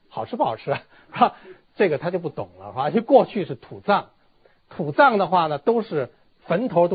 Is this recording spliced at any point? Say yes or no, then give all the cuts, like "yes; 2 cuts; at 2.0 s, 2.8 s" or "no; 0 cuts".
no; 0 cuts